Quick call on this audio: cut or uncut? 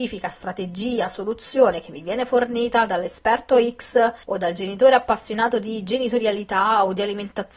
uncut